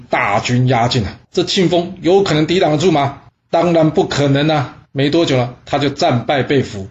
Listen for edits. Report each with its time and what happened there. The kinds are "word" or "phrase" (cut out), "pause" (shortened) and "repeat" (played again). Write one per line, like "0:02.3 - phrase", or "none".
0:01.2 - pause
0:03.3 - pause
0:04.9 - pause